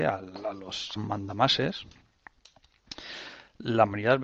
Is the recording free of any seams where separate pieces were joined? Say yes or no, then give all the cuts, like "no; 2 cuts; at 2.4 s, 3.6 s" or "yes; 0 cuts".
no; 1 cut; at 1.0 s